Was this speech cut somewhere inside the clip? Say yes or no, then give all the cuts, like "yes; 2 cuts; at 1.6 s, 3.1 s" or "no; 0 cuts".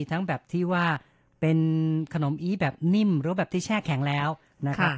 no; 0 cuts